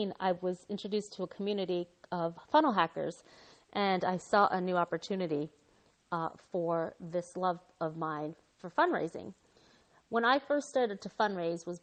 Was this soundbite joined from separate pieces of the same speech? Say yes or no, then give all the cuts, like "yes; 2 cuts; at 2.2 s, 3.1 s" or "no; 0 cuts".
no; 0 cuts